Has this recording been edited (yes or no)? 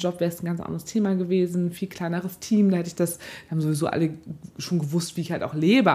no